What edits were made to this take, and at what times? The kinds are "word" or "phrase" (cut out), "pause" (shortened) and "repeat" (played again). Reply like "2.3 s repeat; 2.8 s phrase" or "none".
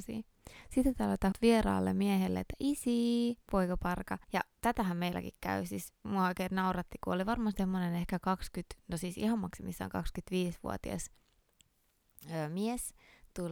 1.3 s word; 3.4 s pause; 4.2 s pause